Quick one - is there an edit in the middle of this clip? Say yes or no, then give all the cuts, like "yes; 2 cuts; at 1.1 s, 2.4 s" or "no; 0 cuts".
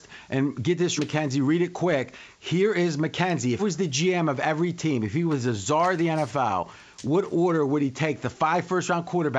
yes; 2 cuts; at 1.0 s, 3.6 s